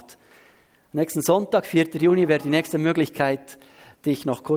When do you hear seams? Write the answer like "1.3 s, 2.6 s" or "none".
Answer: none